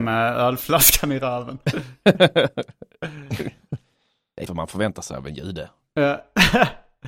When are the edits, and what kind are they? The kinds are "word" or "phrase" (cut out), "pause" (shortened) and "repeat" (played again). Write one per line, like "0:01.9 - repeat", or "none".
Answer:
0:04.5 - word